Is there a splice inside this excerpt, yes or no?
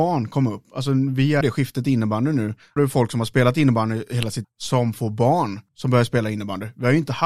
yes